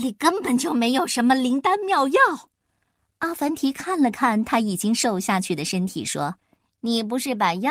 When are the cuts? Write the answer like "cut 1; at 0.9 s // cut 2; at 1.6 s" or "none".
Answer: cut 1; at 2.5 s // cut 2; at 6.4 s